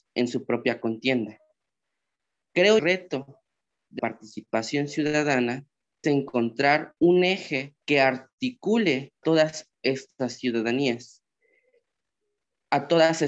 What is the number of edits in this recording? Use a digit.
6